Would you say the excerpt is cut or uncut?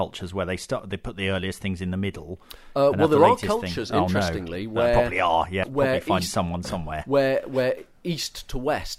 cut